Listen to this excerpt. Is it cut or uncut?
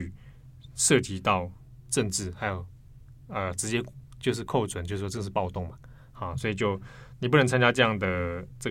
uncut